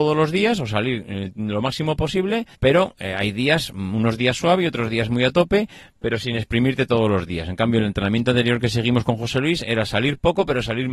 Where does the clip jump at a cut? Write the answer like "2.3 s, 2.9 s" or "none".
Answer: 2.5 s